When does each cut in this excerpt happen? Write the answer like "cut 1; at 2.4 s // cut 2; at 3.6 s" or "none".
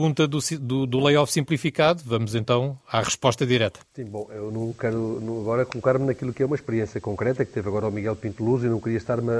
cut 1; at 2.8 s // cut 2; at 3.8 s

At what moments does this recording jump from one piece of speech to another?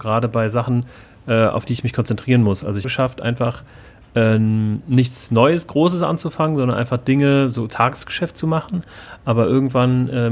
cut 1; at 2.8 s

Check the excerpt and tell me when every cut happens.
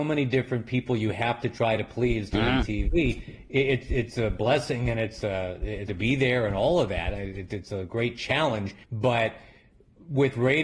cut 1; at 5.9 s // cut 2; at 8.8 s

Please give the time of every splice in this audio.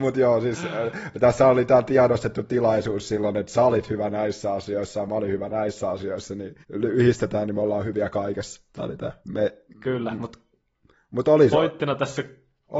cut 1; at 6.6 s // cut 2; at 8.7 s // cut 3; at 9.2 s

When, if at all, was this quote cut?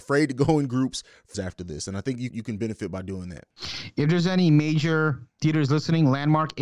cut 1; at 1.3 s // cut 2; at 2.3 s

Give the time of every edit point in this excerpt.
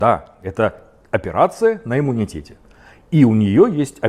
none

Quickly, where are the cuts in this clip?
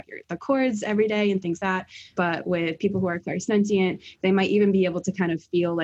cut 1; at 1.6 s // cut 2; at 2.2 s

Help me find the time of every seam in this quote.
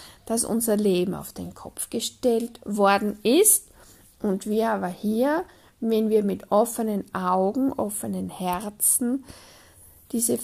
none

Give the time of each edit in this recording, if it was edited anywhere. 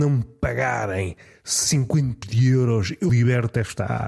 cut 1; at 2.2 s // cut 2; at 3.1 s

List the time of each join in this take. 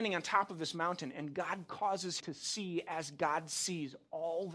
cut 1; at 2.2 s

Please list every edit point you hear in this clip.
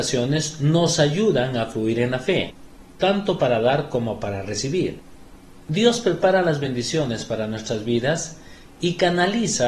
none

